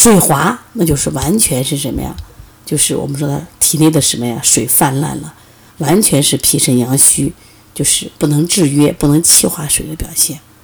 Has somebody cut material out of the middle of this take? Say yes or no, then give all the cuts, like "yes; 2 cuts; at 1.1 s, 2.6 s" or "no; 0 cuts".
yes; 2 cuts; at 3.5 s, 8.2 s